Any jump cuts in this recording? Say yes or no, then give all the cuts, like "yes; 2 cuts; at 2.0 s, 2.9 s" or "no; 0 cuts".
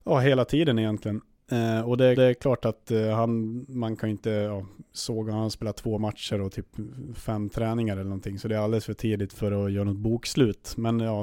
yes; 2 cuts; at 2.2 s, 4.9 s